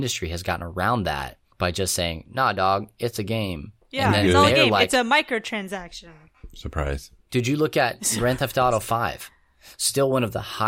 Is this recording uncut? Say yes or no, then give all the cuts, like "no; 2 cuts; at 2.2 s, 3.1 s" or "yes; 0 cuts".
no; 3 cuts; at 1.5 s, 3.8 s, 7.2 s